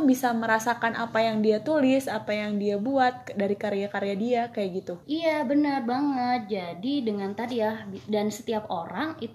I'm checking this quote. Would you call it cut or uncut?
cut